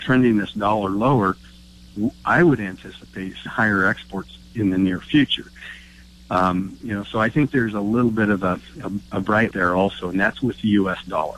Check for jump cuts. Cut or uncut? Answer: cut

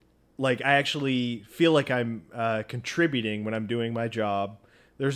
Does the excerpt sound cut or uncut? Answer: uncut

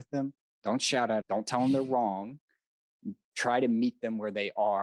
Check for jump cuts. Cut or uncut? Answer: cut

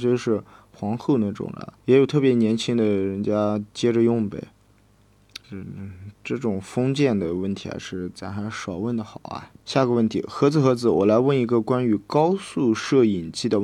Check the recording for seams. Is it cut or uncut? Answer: cut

